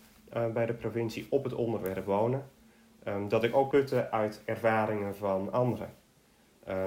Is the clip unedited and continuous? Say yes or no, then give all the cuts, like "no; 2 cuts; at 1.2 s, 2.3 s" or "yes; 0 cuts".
no; 1 cut; at 3.7 s